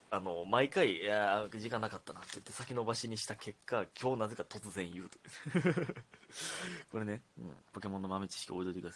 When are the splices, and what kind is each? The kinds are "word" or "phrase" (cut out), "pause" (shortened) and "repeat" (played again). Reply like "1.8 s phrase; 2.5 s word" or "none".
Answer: 7.3 s pause; 7.6 s pause